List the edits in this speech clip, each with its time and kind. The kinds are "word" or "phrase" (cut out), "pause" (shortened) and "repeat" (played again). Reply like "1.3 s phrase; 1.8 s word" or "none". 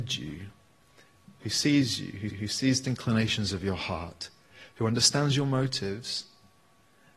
2.3 s repeat; 2.8 s word